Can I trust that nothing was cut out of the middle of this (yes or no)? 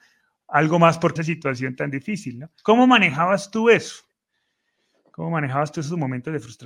no